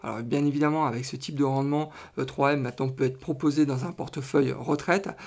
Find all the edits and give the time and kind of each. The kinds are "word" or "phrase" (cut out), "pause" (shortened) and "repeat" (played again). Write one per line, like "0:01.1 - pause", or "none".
none